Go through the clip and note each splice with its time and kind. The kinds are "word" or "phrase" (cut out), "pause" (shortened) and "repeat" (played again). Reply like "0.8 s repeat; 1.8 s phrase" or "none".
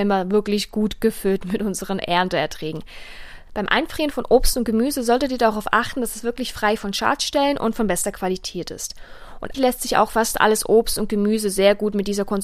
9.5 s word